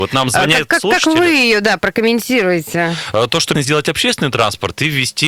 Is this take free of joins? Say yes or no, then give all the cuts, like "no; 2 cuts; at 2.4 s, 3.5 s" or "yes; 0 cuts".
no; 1 cut; at 3.5 s